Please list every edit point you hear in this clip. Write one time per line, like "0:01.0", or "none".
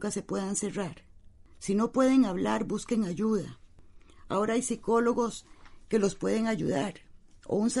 0:01.5